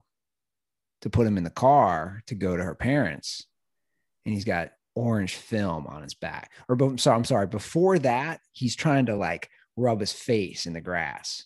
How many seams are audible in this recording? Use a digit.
0